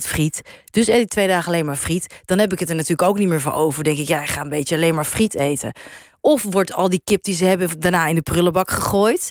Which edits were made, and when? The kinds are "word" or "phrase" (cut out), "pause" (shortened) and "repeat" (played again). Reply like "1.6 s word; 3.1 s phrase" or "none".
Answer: none